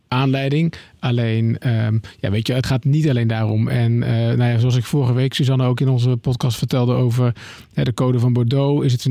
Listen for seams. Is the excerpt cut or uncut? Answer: cut